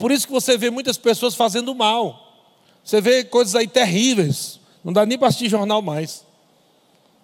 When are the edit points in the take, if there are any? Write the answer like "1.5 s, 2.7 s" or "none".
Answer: 2.6 s